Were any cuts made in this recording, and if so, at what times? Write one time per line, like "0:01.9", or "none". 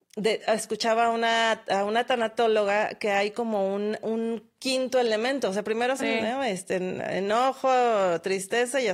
0:06.0